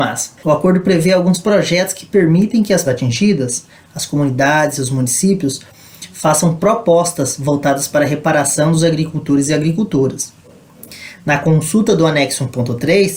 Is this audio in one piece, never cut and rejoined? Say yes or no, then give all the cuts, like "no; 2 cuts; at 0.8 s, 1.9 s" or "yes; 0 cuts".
no; 1 cut; at 2.8 s